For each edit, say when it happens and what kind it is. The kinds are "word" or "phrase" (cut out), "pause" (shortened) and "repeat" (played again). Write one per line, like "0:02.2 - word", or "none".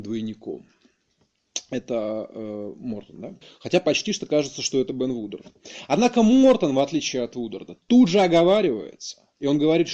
0:03.4 - pause